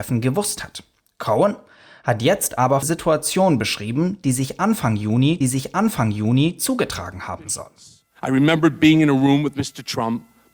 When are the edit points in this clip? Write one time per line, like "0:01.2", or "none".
0:02.8
0:05.4